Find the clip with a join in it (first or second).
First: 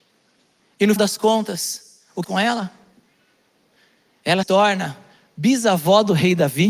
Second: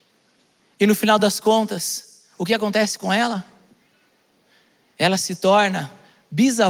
first